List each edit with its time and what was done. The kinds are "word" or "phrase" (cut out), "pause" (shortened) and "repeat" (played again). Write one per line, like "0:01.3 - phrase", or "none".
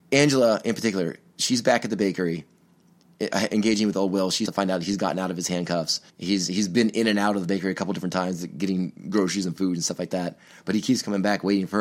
0:04.5 - word
0:06.1 - pause